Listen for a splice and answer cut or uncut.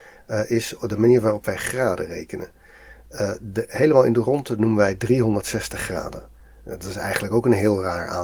uncut